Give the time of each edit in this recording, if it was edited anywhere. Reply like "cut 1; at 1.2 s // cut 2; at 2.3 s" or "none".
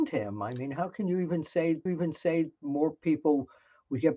cut 1; at 1.9 s